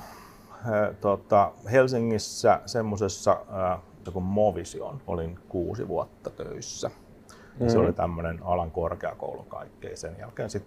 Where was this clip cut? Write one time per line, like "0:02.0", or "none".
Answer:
0:04.1
0:05.0
0:09.4